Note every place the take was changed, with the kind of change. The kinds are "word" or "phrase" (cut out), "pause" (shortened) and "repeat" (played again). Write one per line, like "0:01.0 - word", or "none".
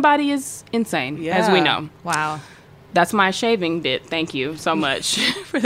none